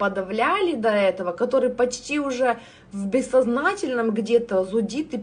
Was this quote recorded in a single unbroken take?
yes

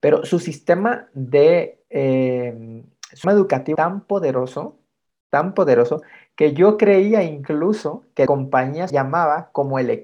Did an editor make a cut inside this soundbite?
yes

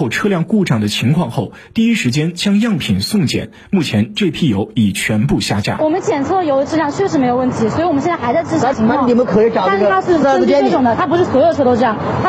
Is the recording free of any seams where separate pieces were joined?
yes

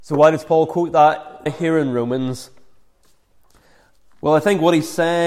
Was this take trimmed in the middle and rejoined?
yes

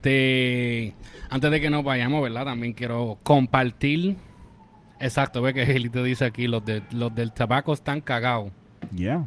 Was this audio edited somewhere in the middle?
no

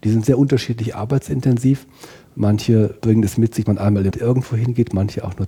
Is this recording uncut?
no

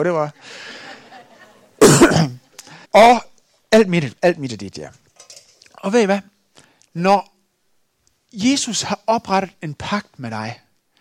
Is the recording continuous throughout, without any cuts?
no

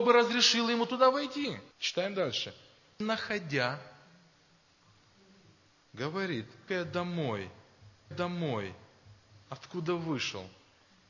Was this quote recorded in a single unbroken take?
no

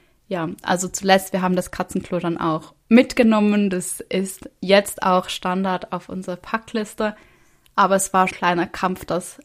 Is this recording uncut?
no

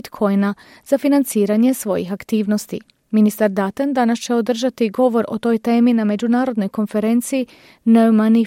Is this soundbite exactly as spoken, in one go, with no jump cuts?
yes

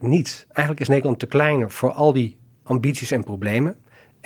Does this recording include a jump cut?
no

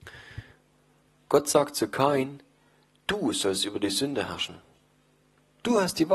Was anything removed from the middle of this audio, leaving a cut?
no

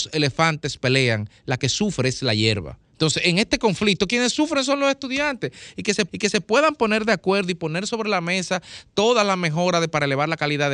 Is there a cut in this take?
yes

